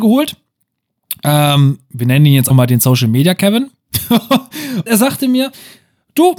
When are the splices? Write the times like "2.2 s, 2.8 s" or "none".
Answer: 2.5 s, 4.9 s